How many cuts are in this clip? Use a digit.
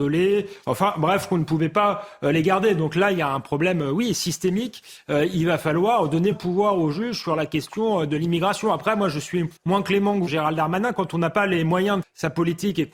4